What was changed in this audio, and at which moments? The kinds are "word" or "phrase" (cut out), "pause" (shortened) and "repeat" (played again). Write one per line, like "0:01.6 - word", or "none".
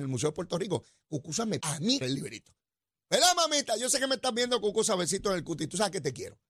0:01.6 - word
0:02.0 - phrase